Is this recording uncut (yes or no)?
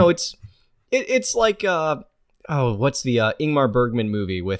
yes